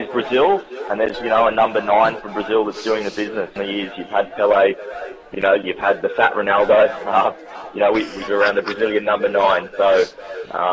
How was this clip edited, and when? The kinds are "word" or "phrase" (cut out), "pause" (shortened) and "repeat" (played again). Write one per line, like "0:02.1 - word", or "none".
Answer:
0:01.1 - word
0:03.6 - phrase
0:06.0 - word
0:08.3 - phrase